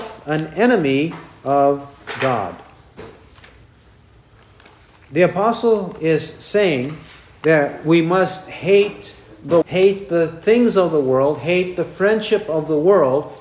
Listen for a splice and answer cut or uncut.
cut